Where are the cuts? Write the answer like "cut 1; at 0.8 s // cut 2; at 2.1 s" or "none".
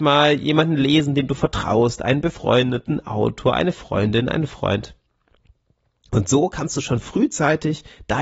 none